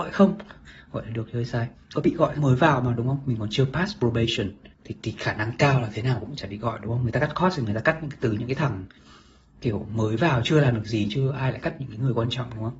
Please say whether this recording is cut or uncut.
cut